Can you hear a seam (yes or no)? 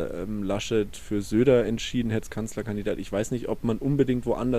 yes